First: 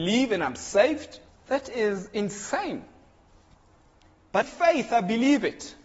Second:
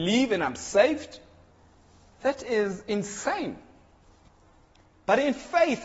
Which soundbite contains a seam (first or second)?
first